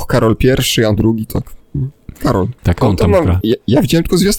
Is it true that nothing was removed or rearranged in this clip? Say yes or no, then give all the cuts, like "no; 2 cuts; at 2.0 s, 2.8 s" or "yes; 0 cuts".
no; 3 cuts; at 1.0 s, 2.8 s, 3.4 s